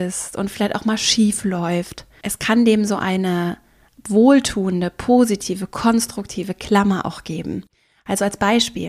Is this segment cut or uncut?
uncut